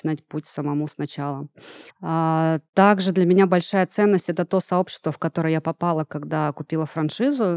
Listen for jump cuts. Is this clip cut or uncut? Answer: cut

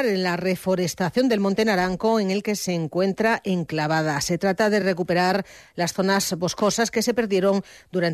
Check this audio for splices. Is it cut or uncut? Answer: uncut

